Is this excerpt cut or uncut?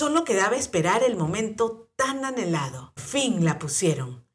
cut